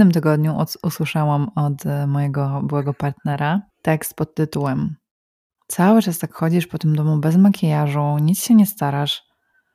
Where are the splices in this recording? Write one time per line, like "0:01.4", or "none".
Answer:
0:03.7
0:05.6

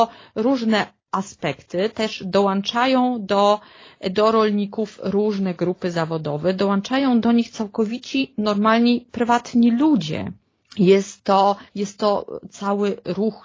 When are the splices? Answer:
0:01.0
0:10.6
0:11.7

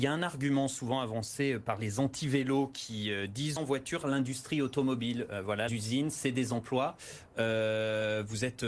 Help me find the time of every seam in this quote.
0:03.6
0:04.0
0:05.7

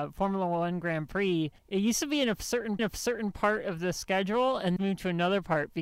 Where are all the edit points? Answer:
0:01.6
0:02.8
0:04.8

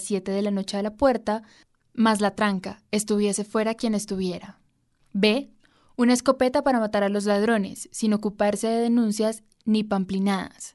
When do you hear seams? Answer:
none

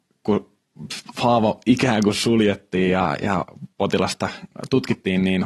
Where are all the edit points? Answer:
none

